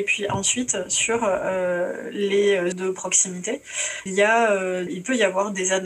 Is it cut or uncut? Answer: cut